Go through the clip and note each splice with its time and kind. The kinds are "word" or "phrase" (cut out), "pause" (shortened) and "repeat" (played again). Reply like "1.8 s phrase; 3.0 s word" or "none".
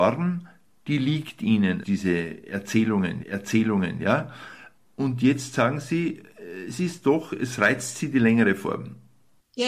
1.8 s word; 3.2 s repeat